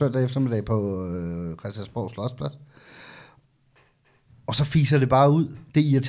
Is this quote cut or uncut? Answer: uncut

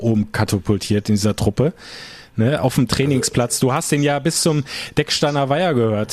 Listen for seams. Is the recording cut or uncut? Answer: uncut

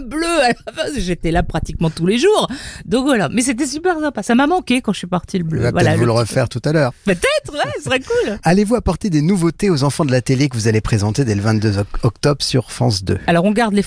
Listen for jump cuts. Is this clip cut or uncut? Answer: uncut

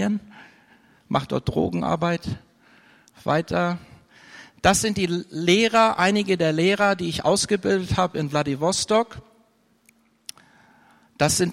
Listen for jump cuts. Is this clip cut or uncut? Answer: uncut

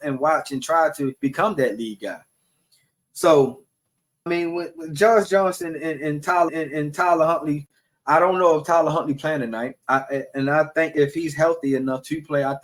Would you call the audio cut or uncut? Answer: cut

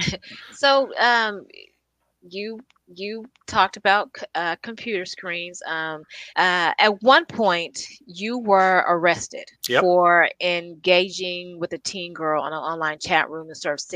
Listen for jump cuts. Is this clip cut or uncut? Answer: cut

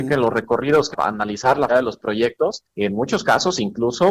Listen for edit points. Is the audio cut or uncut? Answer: cut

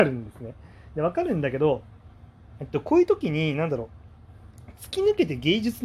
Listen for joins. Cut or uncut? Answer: uncut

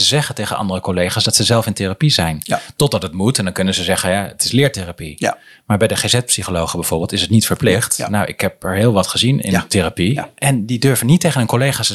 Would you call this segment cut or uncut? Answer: uncut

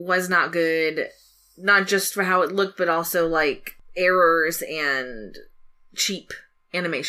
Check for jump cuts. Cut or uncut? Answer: uncut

